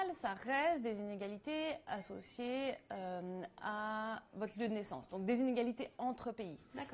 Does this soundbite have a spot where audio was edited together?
no; 0 cuts

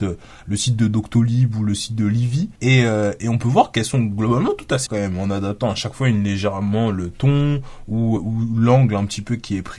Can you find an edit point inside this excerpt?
yes; 3 cuts; at 2.6 s, 4.9 s, 8.2 s

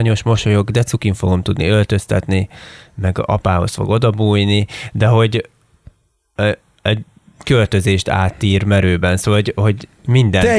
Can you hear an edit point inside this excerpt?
no; 0 cuts

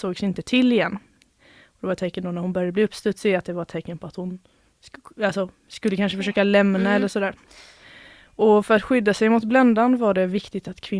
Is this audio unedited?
yes; 0 cuts

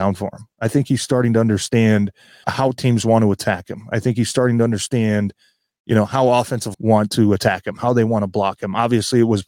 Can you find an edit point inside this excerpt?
yes; 2 cuts; at 2.4 s, 6.7 s

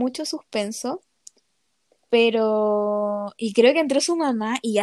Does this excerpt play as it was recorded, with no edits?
yes; 0 cuts

